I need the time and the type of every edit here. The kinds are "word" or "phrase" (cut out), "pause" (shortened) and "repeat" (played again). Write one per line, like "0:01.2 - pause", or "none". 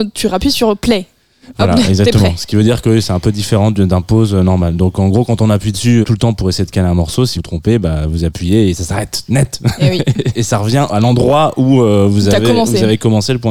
0:06.0 - word
0:07.3 - word
0:10.3 - word